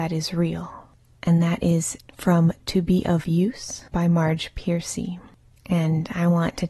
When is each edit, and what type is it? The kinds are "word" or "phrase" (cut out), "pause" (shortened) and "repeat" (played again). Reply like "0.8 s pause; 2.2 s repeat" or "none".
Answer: 3.9 s pause